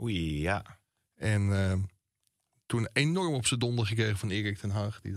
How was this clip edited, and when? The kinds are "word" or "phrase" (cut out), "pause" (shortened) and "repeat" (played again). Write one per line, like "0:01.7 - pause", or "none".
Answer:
none